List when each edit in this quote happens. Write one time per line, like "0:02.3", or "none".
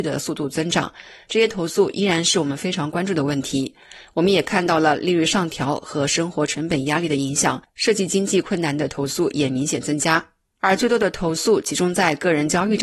none